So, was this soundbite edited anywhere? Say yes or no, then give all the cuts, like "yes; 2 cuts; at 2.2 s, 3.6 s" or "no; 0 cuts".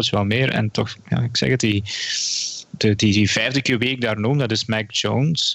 no; 0 cuts